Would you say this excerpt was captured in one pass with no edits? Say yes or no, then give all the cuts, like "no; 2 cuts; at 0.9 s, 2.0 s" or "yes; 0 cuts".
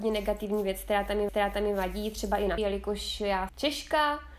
no; 3 cuts; at 1.3 s, 2.6 s, 3.5 s